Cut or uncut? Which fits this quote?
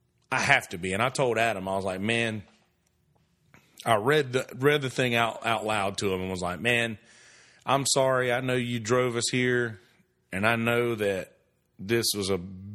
uncut